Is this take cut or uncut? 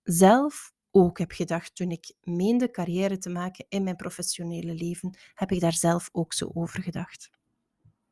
uncut